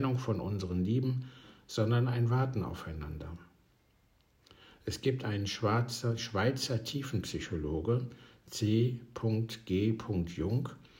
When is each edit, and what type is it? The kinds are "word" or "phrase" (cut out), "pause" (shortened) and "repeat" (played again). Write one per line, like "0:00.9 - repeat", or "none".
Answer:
none